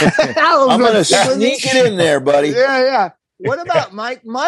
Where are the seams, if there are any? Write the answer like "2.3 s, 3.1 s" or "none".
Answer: none